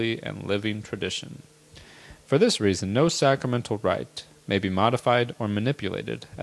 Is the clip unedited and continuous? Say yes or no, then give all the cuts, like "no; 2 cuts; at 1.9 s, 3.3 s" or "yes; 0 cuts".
yes; 0 cuts